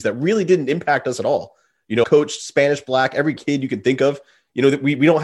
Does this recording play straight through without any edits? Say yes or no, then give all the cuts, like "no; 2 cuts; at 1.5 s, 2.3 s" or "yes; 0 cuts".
no; 2 cuts; at 2.0 s, 3.4 s